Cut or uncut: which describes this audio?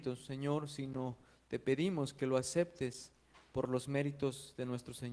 uncut